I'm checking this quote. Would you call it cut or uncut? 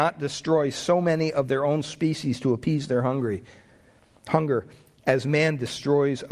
uncut